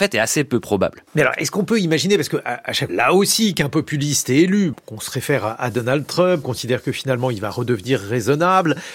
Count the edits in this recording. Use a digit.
4